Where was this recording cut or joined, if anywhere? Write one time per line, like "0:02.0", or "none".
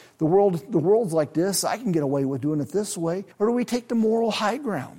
0:03.3